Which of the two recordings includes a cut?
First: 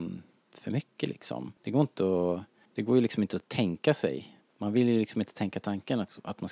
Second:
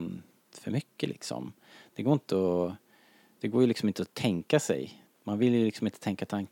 first; 2 cuts; at 1.6 s, 2.7 s

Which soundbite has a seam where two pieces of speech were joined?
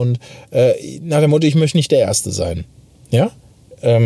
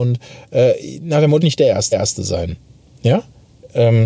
second; 2 cuts; at 1.4 s, 1.9 s

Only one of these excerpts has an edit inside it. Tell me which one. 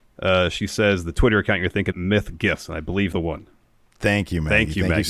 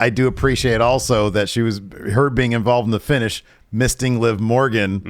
first; 2 cuts; at 1.9 s, 3.1 s

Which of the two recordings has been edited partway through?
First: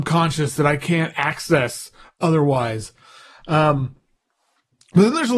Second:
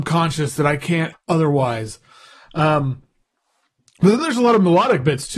second; 1 cut; at 1.1 s

